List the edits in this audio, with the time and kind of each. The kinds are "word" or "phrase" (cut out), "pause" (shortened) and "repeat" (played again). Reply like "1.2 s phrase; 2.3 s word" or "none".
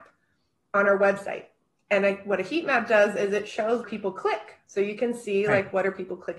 3.8 s word